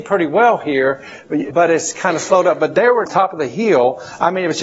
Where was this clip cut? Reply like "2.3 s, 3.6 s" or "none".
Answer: 1.5 s, 3.1 s